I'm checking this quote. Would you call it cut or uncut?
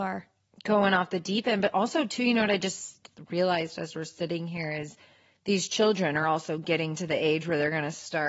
uncut